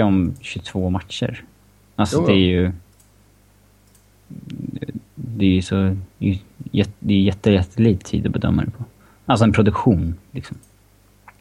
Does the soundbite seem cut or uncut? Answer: uncut